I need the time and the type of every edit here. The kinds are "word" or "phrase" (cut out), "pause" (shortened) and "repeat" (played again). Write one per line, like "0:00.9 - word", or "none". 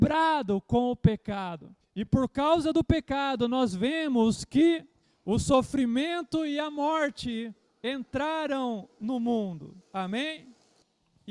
none

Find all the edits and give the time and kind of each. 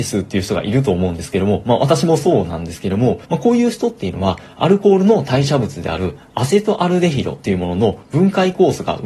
0:03.2 - pause

